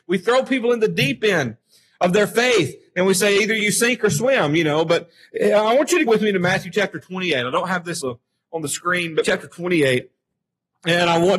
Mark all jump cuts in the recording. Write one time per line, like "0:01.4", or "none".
0:06.1
0:08.0
0:09.2